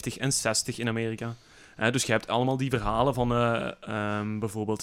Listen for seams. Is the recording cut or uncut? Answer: uncut